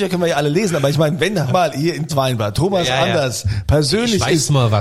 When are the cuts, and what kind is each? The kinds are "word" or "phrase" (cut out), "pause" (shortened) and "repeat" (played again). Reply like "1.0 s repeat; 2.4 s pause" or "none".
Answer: 1.5 s word; 2.1 s word